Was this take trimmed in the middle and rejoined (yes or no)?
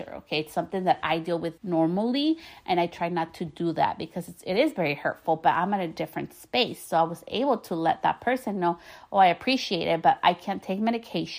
yes